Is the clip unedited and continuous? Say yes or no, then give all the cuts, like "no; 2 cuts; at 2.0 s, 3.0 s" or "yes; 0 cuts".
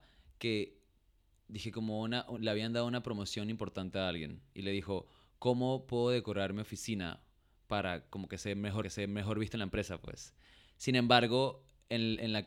no; 1 cut; at 8.8 s